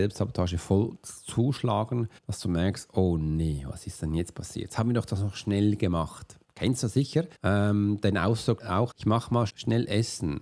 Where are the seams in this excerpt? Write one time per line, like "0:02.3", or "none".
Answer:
0:02.2
0:06.4
0:07.4
0:08.6
0:08.9
0:09.5